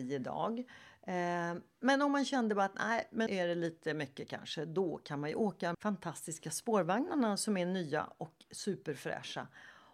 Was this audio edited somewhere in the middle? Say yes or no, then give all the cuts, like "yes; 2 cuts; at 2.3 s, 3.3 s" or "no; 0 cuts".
yes; 2 cuts; at 3.3 s, 5.7 s